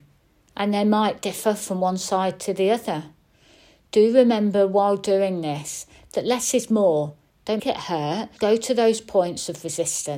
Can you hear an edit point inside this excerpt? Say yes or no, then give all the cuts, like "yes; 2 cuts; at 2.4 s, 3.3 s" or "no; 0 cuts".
yes; 2 cuts; at 7.6 s, 8.4 s